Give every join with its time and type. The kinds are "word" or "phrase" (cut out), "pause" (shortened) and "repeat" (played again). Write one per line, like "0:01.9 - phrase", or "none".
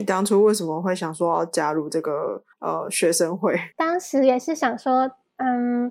0:02.5 - pause
0:03.7 - pause